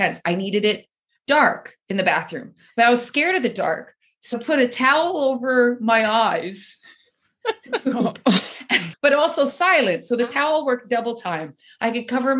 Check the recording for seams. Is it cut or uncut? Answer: cut